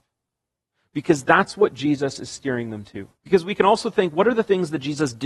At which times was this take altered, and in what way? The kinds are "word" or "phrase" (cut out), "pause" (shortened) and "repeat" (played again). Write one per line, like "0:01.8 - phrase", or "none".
0:03.2 - pause